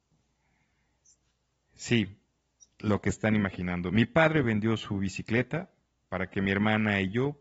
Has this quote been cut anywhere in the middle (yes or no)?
no